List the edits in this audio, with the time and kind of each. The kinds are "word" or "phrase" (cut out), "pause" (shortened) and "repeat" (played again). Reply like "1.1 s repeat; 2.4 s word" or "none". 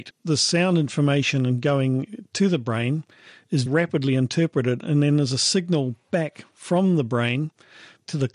3.7 s word